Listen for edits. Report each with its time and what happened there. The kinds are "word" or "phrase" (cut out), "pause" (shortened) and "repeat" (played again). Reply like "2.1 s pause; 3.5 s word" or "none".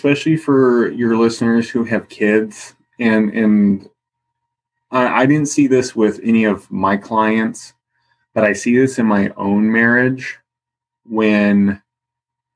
none